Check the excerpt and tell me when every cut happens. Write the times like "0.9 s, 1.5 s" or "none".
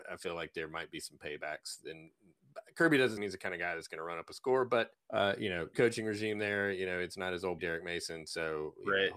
3.2 s, 4.9 s, 5.7 s, 7.6 s